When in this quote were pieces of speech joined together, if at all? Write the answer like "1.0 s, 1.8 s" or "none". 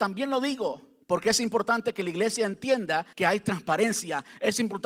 1.0 s, 3.1 s

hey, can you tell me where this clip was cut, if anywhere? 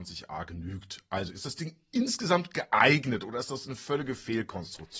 none

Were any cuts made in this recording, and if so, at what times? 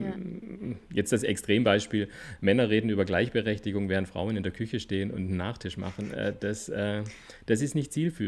none

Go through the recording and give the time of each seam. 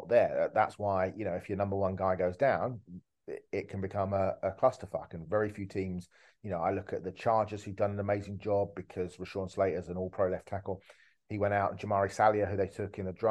none

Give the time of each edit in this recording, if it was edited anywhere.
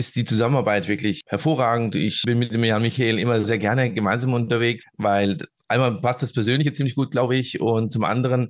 none

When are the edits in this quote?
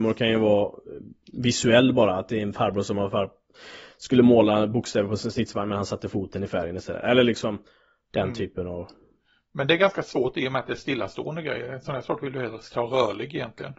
none

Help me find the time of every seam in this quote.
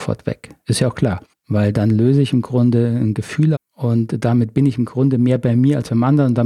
1.3 s, 3.5 s

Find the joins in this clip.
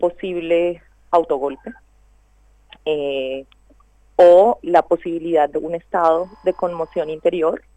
4.6 s, 5.5 s

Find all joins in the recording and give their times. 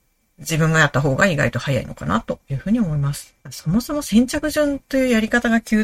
3.4 s

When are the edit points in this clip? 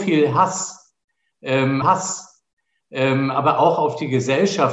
1.8 s

